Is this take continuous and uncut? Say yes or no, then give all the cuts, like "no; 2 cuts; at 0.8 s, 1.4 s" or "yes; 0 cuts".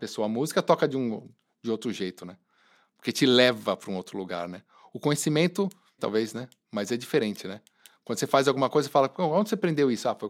no; 1 cut; at 6.0 s